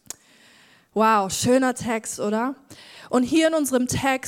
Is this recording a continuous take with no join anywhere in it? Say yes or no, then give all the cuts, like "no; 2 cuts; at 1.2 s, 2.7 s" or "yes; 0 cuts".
yes; 0 cuts